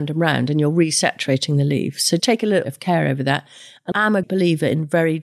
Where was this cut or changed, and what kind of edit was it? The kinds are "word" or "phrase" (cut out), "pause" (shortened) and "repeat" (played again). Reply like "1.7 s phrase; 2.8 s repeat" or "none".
2.2 s word; 2.6 s word; 3.9 s word; 4.2 s word